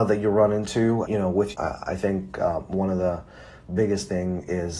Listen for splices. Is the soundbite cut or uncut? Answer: cut